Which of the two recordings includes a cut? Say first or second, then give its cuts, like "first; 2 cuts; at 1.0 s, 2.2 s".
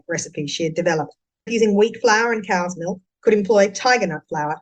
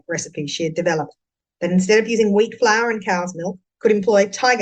first; 1 cut; at 1.5 s